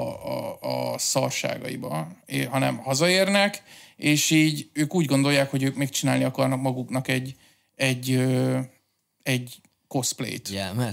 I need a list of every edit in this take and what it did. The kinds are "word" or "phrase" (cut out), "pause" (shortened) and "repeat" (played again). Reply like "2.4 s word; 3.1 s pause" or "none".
none